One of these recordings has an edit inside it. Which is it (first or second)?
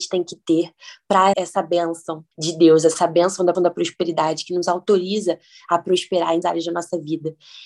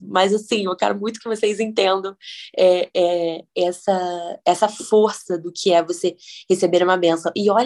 first